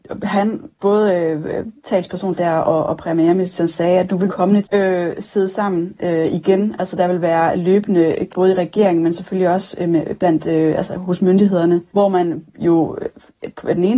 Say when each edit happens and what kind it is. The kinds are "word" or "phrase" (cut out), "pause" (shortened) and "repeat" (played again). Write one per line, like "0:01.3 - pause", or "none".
0:02.4 - word
0:04.3 - phrase
0:04.6 - word
0:08.3 - word
0:11.9 - pause